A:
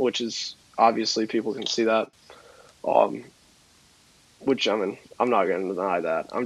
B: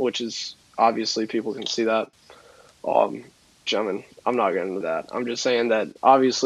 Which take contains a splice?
B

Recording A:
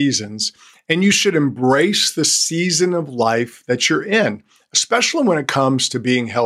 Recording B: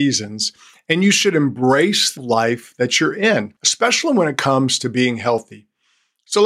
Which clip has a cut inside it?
B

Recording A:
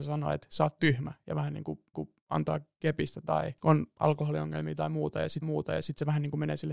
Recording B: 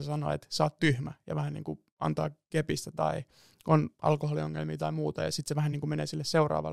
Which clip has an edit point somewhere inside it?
A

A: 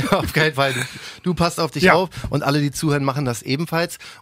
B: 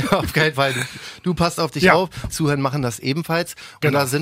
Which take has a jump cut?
B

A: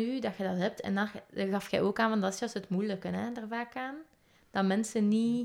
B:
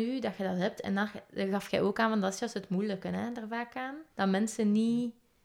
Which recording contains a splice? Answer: B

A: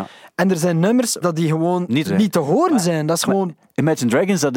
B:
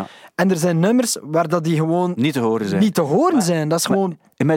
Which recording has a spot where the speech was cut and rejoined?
A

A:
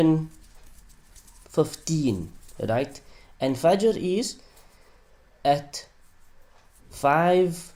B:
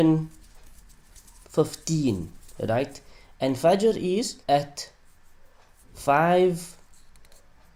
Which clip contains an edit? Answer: B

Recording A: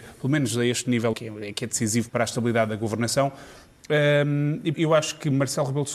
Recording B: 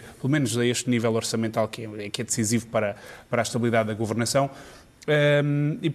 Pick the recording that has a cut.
A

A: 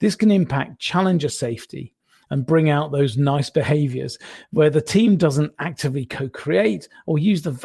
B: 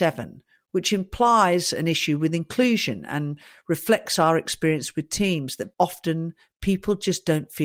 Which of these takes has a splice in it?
B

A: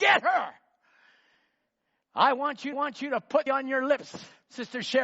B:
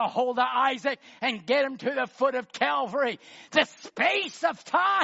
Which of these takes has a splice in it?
A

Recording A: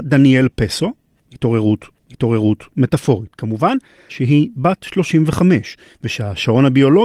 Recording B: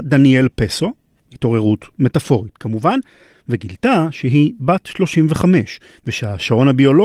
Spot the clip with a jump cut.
A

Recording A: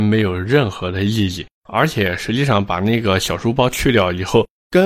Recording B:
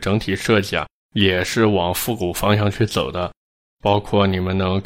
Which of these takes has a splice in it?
A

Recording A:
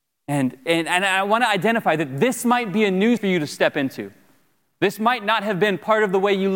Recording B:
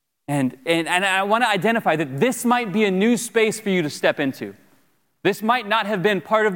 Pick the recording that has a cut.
A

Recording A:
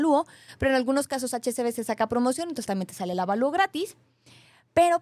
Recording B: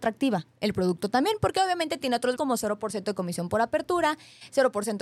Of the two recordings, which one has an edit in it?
B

